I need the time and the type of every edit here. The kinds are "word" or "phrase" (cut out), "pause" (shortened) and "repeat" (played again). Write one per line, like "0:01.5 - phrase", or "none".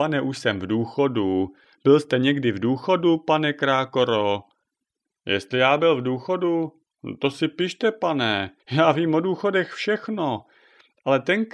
0:08.6 - pause